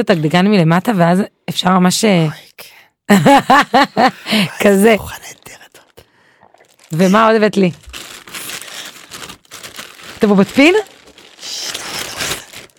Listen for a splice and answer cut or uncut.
uncut